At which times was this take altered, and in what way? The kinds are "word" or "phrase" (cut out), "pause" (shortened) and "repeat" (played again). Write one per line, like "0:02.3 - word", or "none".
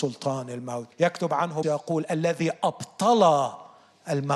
0:00.9 - pause
0:01.6 - word